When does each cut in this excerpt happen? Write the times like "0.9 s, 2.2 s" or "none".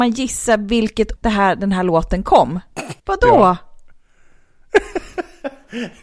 1.2 s, 3.0 s